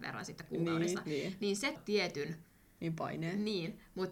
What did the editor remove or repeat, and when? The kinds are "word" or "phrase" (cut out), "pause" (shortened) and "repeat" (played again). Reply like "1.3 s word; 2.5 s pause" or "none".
1.8 s word

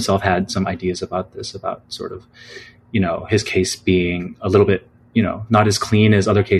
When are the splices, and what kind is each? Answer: none

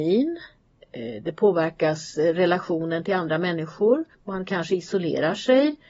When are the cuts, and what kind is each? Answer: 4.1 s pause

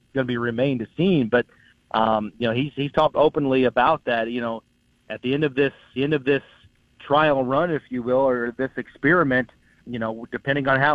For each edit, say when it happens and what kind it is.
6.0 s repeat; 9.8 s word

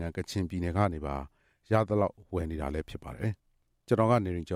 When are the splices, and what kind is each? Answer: 3.4 s pause

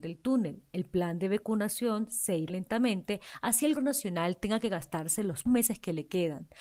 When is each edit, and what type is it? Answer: 2.5 s word; 3.8 s word; 5.5 s word

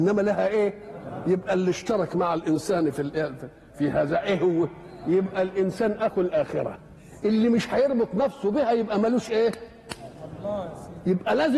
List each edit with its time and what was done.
none

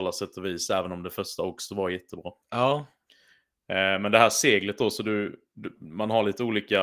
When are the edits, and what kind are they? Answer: 2.4 s pause

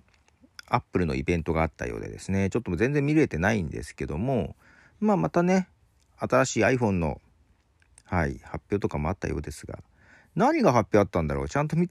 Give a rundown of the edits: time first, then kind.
none

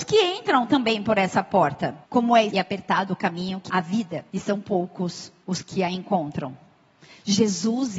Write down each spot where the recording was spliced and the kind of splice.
2.0 s pause; 2.5 s phrase; 3.7 s word; 4.3 s pause; 5.4 s pause

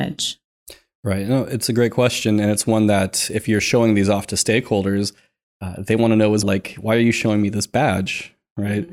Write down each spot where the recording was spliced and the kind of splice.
6.4 s word

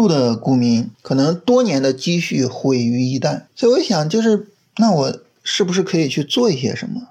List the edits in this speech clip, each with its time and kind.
0.9 s pause; 3.5 s pause

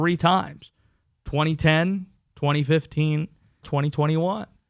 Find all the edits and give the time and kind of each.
3.6 s phrase

